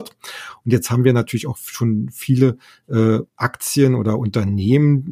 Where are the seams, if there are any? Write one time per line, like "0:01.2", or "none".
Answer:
0:03.3